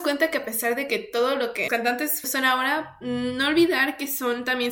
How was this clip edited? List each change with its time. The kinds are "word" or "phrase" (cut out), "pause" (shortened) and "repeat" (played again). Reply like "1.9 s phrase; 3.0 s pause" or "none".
1.7 s word; 2.2 s word